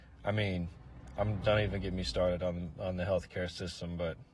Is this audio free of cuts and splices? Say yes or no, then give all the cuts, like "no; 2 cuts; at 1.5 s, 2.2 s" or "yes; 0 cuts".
yes; 0 cuts